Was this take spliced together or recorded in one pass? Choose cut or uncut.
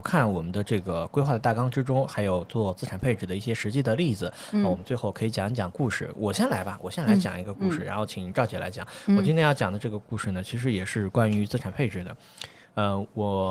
uncut